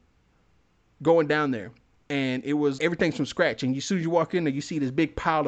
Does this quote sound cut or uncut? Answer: cut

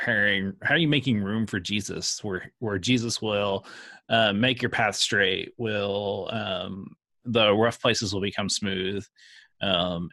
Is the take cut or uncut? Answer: uncut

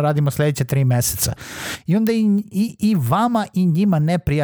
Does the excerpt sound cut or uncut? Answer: uncut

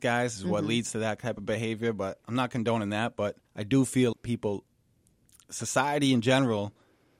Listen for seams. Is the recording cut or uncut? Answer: cut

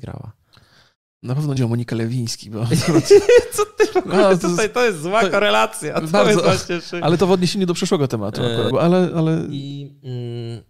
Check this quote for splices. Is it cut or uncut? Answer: cut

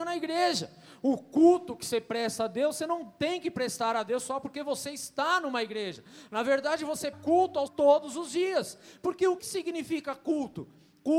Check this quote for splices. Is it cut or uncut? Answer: cut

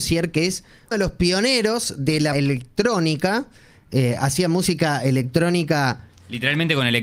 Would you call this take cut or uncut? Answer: cut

